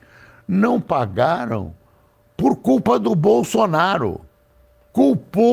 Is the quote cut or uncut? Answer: uncut